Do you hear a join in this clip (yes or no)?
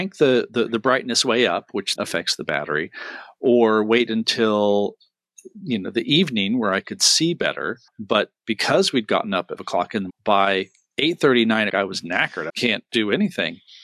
yes